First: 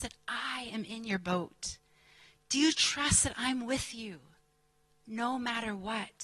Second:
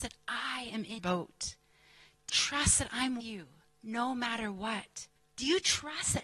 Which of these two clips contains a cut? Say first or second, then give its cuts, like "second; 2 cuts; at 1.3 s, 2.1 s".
second; 5 cuts; at 1.0 s, 2.3 s, 3.2 s, 3.7 s, 5.2 s